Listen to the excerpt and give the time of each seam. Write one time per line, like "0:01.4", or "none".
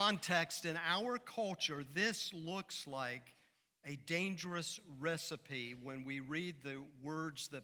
none